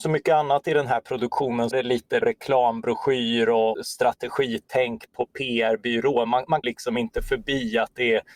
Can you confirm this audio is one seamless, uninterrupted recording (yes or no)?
no